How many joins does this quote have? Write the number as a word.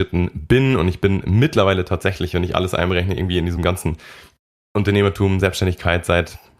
zero